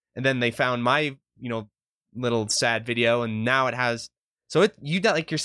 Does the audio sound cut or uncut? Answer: uncut